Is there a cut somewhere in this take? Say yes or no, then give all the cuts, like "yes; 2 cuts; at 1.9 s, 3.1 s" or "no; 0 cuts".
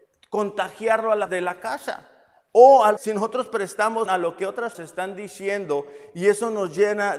yes; 4 cuts; at 1.3 s, 3.0 s, 4.1 s, 4.7 s